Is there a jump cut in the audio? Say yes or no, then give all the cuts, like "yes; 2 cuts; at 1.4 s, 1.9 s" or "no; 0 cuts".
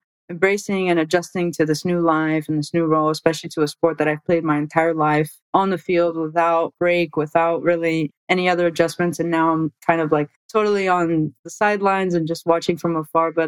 yes; 2 cuts; at 5.4 s, 10.4 s